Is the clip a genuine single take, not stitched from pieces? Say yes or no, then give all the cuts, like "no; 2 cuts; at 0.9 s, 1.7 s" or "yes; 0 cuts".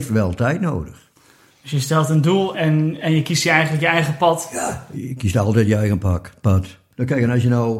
no; 1 cut; at 2.5 s